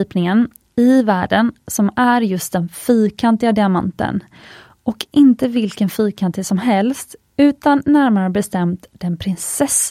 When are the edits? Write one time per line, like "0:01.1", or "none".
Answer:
none